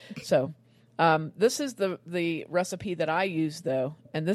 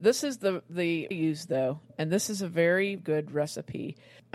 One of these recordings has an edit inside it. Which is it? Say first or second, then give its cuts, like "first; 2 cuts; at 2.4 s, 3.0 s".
second; 2 cuts; at 1.1 s, 3.0 s